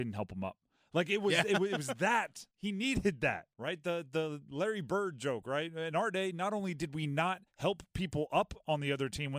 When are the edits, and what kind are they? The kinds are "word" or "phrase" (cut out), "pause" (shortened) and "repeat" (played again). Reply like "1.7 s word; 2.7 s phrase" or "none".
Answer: 2.5 s pause; 3.5 s pause; 7.5 s pause